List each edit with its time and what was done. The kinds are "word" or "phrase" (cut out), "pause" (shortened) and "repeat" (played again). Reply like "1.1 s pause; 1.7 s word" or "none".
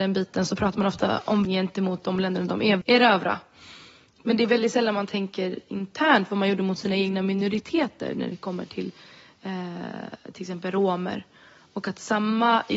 1.4 s word